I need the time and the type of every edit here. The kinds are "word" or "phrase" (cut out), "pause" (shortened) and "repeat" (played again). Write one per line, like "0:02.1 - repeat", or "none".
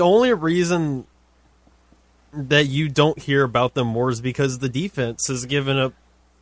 none